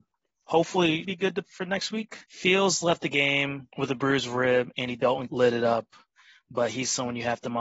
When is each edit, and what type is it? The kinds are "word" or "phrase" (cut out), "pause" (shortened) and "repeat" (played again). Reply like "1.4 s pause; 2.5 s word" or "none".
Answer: 1.0 s word; 1.4 s word; 2.2 s pause; 3.7 s pause; 5.3 s phrase